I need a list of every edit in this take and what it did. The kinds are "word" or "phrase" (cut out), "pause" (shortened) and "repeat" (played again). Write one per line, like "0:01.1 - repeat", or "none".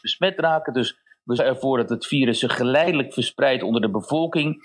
0:01.4 - word